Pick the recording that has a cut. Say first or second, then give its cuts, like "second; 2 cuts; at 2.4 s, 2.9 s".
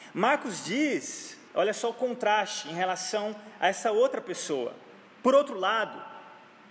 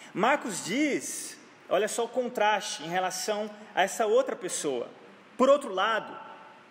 first; 1 cut; at 1.5 s